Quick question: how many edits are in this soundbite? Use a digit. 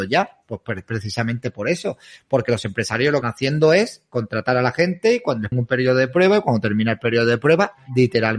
2